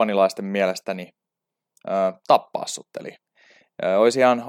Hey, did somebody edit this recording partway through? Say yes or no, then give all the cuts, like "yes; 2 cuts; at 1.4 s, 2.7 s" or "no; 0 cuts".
no; 0 cuts